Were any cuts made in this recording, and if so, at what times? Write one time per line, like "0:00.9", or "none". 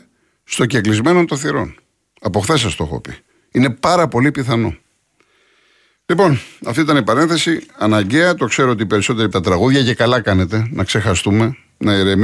0:09.3